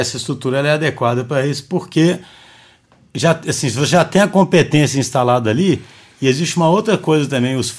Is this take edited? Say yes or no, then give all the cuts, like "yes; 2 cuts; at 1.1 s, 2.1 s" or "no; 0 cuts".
no; 0 cuts